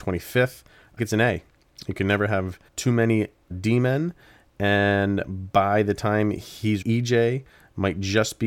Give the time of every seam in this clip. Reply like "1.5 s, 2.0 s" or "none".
1.0 s, 2.7 s, 3.5 s, 6.8 s